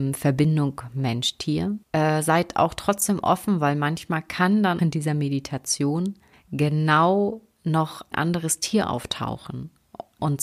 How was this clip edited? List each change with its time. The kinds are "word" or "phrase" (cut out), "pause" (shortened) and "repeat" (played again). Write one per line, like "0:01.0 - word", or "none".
0:01.8 - pause
0:04.8 - word
0:06.3 - pause
0:08.1 - word